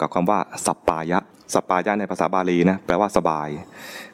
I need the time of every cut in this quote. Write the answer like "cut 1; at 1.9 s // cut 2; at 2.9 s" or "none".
cut 1; at 1.3 s